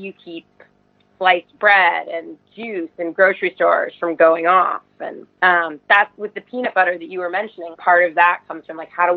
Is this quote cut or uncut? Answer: cut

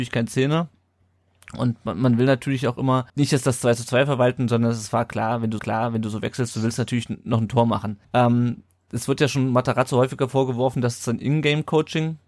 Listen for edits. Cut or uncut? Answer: cut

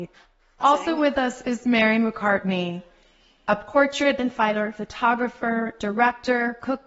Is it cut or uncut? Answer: uncut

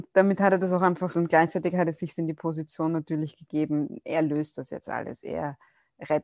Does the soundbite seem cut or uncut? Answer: cut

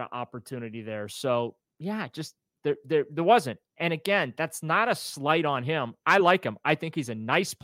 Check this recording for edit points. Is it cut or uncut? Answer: uncut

